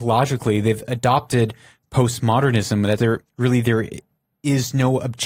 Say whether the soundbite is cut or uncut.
cut